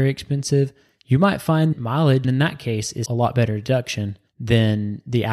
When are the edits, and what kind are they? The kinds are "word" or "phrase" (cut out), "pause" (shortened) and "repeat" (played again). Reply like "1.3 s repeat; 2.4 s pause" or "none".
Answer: 1.7 s word; 2.2 s word; 3.1 s word; 4.3 s pause